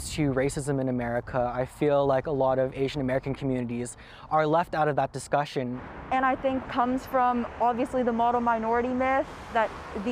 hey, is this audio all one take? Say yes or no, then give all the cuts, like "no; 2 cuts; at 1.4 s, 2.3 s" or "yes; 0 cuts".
no; 1 cut; at 6.7 s